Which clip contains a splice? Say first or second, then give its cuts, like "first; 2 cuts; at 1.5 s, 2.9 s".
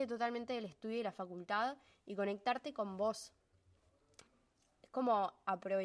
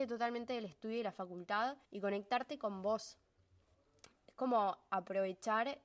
second; 2 cuts; at 1.8 s, 4.2 s